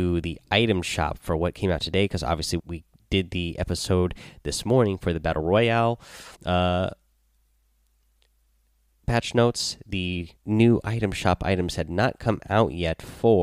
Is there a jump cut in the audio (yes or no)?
yes